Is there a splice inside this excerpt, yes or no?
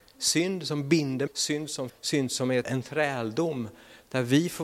yes